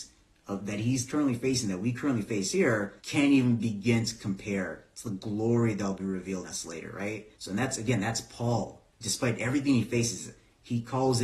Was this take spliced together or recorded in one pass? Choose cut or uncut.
cut